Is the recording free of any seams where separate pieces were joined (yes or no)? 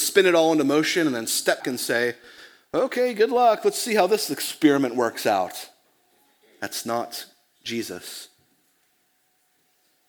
no